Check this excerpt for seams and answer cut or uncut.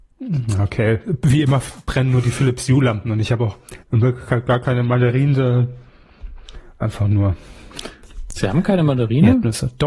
cut